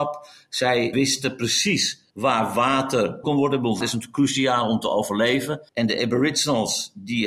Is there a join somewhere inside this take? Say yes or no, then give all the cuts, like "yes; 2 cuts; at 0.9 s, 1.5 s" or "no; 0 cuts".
yes; 5 cuts; at 0.9 s, 2.1 s, 3.2 s, 3.8 s, 5.7 s